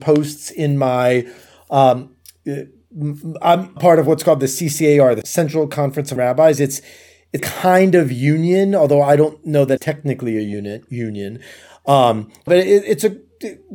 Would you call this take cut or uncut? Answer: cut